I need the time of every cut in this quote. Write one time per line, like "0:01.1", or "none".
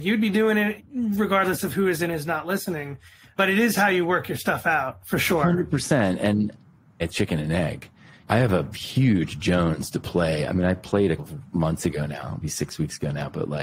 0:07.1
0:11.2
0:12.4